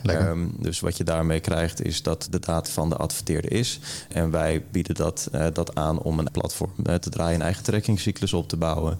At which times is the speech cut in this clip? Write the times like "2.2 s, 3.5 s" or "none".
2.6 s, 6.3 s

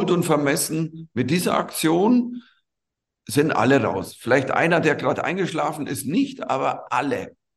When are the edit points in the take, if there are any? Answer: none

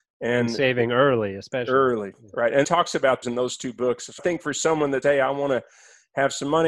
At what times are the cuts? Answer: 2.6 s, 3.2 s, 4.2 s, 5.0 s

